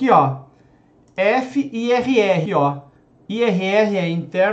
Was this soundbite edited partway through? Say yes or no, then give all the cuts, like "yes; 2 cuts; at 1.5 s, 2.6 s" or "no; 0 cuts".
yes; 1 cut; at 2.5 s